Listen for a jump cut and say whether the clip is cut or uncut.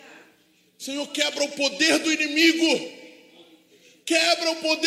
uncut